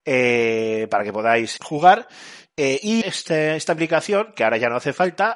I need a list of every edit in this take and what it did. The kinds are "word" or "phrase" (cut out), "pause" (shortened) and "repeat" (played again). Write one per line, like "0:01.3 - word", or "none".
0:01.6 - word
0:03.0 - word